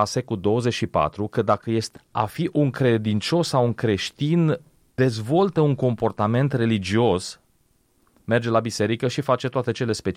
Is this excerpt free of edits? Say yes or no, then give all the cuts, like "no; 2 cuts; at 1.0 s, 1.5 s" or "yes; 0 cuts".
no; 2 cuts; at 2.0 s, 4.9 s